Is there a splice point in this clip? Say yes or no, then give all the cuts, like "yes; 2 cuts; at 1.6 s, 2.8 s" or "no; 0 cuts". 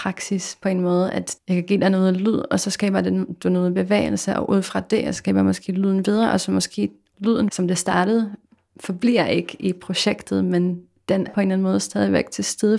yes; 1 cut; at 11.3 s